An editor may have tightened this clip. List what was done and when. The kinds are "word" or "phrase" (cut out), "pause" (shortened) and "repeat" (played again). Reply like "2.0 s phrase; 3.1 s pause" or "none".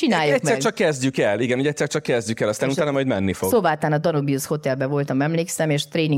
none